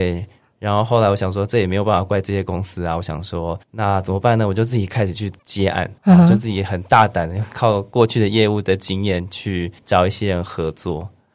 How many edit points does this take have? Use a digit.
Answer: 4